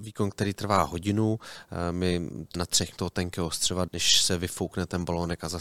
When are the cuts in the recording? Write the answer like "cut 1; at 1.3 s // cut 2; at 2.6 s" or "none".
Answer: cut 1; at 2.5 s // cut 2; at 3.0 s // cut 3; at 3.9 s

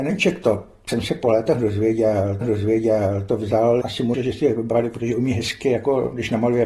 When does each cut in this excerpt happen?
cut 1; at 2.4 s // cut 2; at 3.8 s // cut 3; at 4.1 s

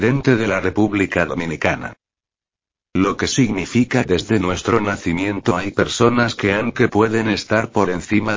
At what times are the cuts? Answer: cut 1; at 4.0 s // cut 2; at 6.7 s

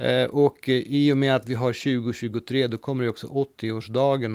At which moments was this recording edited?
none

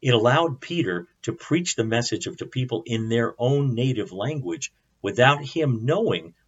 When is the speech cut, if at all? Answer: cut 1; at 2.4 s

